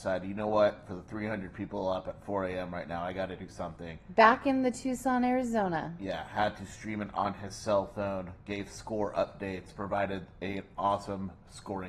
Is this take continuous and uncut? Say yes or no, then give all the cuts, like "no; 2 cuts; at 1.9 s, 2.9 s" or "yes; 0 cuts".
yes; 0 cuts